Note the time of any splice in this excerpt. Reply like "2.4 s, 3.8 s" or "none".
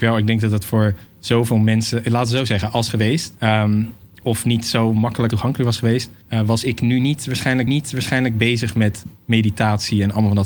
2.9 s, 3.4 s, 5.3 s, 6.2 s, 7.7 s